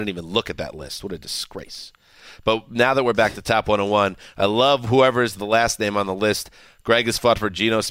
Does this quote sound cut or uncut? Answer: uncut